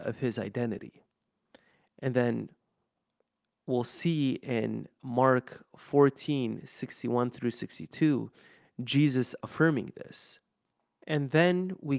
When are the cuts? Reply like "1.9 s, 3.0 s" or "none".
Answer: none